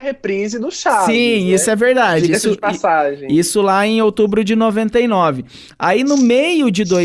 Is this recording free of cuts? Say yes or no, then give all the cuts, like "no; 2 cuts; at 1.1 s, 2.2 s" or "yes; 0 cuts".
yes; 0 cuts